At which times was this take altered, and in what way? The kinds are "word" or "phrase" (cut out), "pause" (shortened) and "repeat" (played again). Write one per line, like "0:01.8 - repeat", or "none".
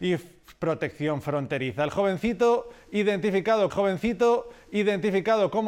0:03.7 - repeat